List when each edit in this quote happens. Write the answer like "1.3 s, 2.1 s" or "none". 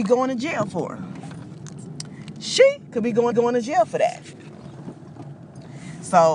3.3 s